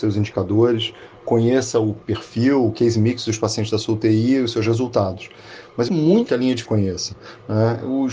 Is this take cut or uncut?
cut